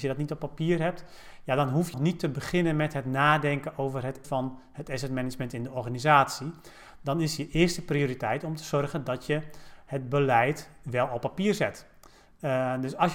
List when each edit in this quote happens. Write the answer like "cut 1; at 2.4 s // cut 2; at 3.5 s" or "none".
cut 1; at 1.9 s // cut 2; at 4.2 s